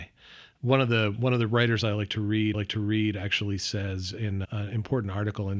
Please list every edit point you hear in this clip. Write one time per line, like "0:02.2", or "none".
0:02.5
0:04.4